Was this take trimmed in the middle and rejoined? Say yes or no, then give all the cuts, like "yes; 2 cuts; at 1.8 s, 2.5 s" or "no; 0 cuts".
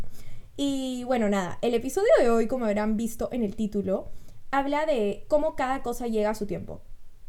no; 0 cuts